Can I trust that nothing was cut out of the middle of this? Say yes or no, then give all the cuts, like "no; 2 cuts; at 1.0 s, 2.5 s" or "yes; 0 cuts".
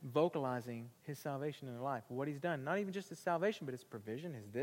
no; 1 cut; at 1.0 s